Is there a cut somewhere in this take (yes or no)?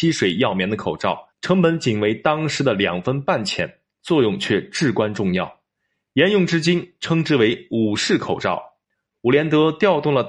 yes